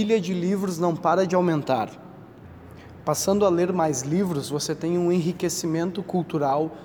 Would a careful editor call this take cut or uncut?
uncut